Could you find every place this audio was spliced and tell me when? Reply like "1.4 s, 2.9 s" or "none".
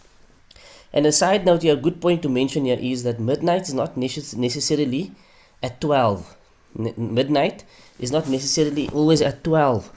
none